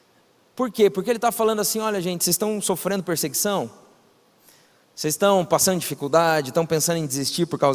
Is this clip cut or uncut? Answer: uncut